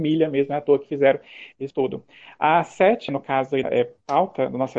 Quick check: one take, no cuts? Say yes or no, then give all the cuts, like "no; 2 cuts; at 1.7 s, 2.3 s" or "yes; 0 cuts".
no; 3 cuts; at 1.7 s, 3.1 s, 3.6 s